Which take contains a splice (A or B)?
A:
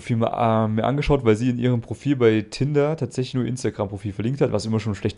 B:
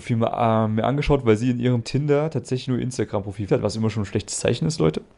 B